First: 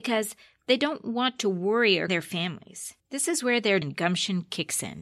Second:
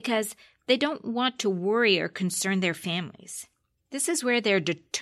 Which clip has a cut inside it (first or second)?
first